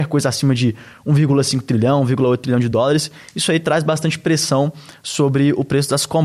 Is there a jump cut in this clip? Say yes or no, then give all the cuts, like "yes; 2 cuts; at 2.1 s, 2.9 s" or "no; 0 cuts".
no; 0 cuts